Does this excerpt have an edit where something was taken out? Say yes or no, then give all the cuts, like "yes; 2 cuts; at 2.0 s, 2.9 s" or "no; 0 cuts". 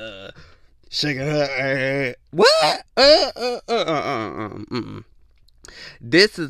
yes; 1 cut; at 2.9 s